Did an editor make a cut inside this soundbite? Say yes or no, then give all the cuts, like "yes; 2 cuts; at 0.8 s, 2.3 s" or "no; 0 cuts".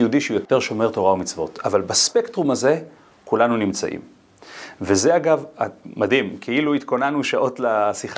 no; 0 cuts